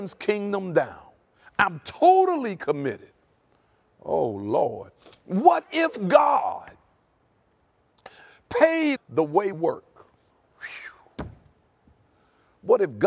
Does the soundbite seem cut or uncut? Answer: cut